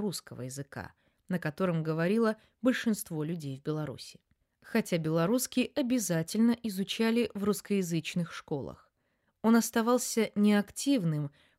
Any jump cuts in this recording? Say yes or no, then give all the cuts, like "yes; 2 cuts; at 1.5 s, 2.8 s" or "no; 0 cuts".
no; 0 cuts